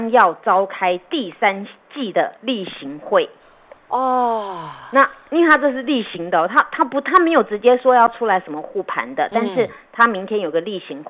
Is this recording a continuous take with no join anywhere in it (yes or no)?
no